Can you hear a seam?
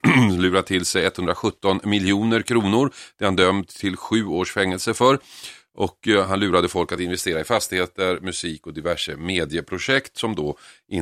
no; 0 cuts

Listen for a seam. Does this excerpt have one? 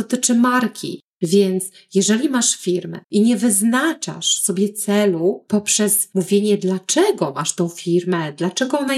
yes; 2 cuts; at 1.1 s, 3.0 s

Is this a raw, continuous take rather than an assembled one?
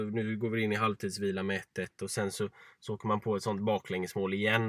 yes; 0 cuts

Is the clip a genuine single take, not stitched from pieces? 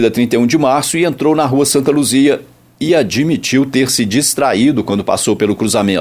yes; 0 cuts

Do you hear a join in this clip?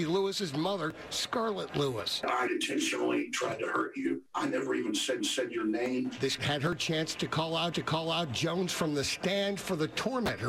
yes; 4 cuts; at 2.5 s, 5.2 s, 6.4 s, 7.7 s

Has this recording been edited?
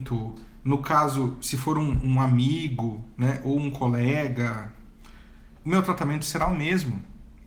yes; 1 cut; at 5.6 s

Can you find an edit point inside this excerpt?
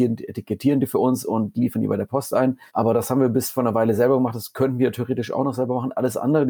yes; 1 cut; at 2.7 s

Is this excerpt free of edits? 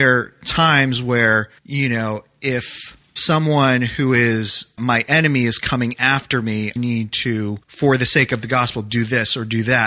no; 5 cuts; at 1.6 s, 3.2 s, 4.8 s, 6.8 s, 7.6 s

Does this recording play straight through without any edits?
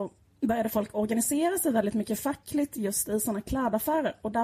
yes; 0 cuts

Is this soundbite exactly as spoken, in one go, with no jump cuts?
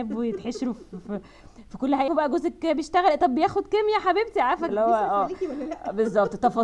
no; 2 cuts; at 2.1 s, 4.7 s

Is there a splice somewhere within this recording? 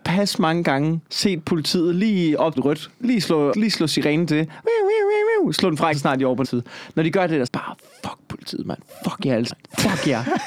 yes; 8 cuts; at 1.0 s, 2.6 s, 2.9 s, 3.5 s, 5.9 s, 6.4 s, 7.5 s, 9.5 s

